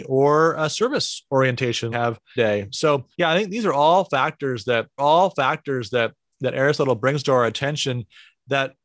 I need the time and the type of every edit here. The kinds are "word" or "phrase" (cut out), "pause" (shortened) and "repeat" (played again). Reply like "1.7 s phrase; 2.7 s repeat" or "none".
1.9 s phrase; 2.4 s phrase; 3.1 s pause; 5.0 s repeat

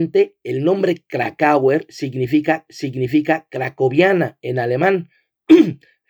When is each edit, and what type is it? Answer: 2.7 s repeat

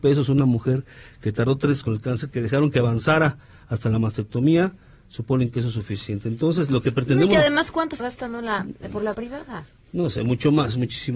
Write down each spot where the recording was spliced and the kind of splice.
1.8 s word; 8.0 s word; 9.1 s word

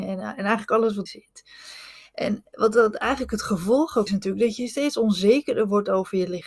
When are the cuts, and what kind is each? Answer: 1.1 s word; 4.1 s word

